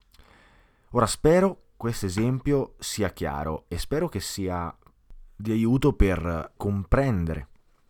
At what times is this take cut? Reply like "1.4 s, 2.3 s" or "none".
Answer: 1.7 s, 6.6 s

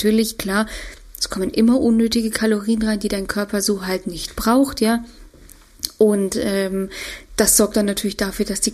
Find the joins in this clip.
none

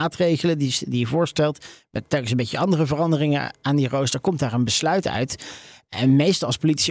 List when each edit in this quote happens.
none

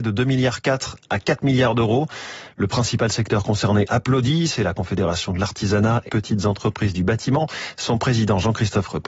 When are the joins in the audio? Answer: 6.1 s

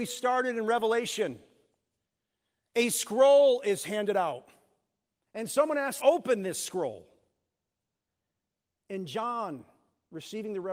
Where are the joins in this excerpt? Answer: 5.1 s, 6.0 s

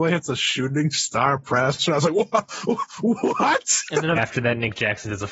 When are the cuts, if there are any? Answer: 4.1 s

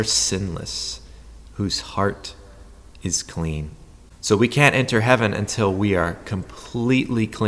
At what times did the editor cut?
none

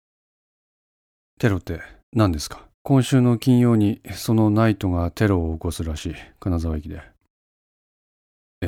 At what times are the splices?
2.0 s, 2.7 s

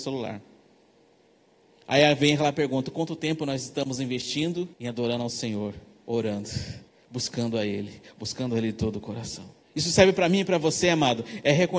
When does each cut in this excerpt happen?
4.7 s, 6.9 s, 9.6 s

